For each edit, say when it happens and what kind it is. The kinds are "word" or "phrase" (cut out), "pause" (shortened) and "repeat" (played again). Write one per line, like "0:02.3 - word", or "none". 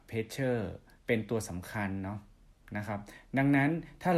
0:01.0 - pause